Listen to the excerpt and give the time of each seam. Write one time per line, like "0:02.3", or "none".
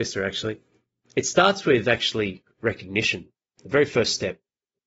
none